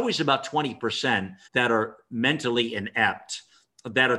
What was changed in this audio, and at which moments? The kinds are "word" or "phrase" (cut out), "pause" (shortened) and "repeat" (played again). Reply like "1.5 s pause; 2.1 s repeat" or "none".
1.4 s pause